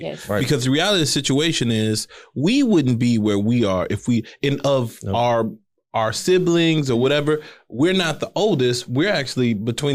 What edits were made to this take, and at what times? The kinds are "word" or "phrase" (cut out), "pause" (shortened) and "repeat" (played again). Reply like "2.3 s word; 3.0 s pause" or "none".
none